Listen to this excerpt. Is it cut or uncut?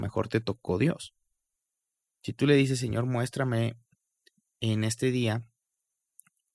uncut